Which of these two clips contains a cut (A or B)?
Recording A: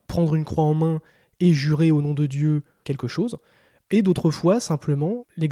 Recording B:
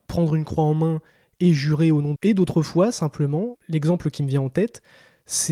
B